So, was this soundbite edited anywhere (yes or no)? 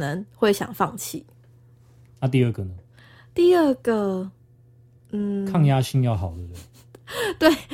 no